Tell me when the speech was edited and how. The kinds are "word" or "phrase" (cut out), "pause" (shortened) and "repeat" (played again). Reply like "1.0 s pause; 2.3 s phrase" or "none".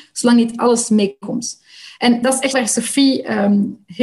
2.2 s word; 2.5 s word